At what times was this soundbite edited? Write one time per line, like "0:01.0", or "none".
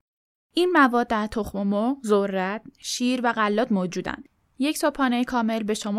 none